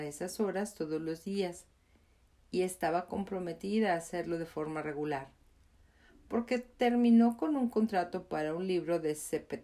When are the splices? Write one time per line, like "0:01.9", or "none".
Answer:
none

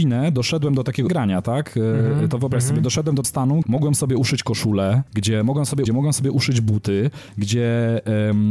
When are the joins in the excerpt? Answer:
0:01.1
0:03.2
0:03.6
0:05.1
0:05.9

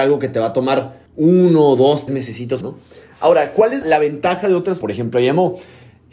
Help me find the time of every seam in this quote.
0:01.1
0:02.1
0:02.6
0:03.8
0:04.8

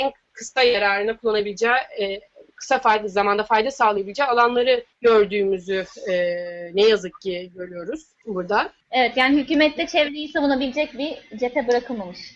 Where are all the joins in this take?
0:02.5
0:04.9

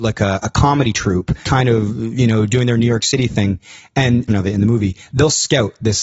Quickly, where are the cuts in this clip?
0:01.4
0:04.3

